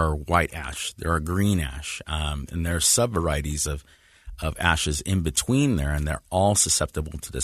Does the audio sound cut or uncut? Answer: uncut